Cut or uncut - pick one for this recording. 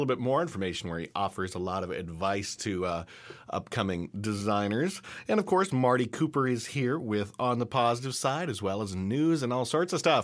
uncut